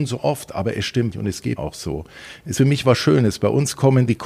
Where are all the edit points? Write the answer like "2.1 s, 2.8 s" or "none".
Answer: 1.1 s, 1.6 s, 2.6 s

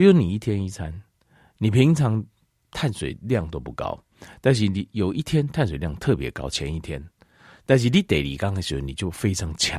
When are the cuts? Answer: none

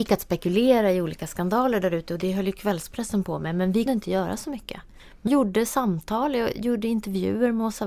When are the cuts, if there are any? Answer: 3.9 s, 5.3 s

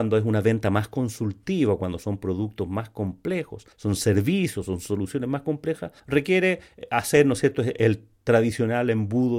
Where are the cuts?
3.7 s, 6.0 s

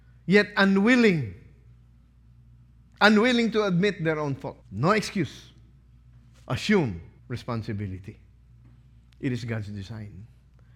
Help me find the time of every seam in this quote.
4.6 s, 7.2 s

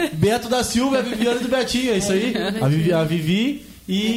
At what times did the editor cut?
none

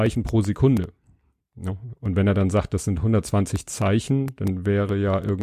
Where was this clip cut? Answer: none

